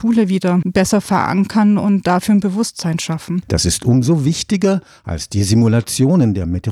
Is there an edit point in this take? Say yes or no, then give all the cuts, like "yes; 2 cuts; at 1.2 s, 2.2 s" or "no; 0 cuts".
no; 0 cuts